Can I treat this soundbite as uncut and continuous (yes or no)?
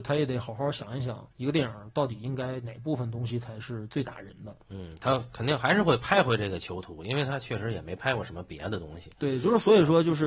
no